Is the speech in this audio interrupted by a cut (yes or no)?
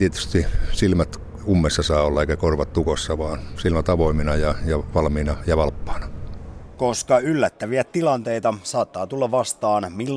no